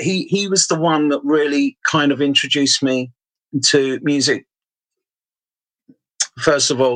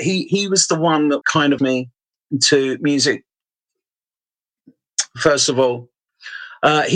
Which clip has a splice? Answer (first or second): second